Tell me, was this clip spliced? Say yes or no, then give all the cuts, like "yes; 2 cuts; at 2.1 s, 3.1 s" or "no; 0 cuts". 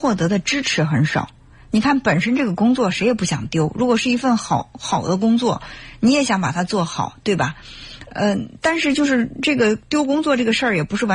no; 0 cuts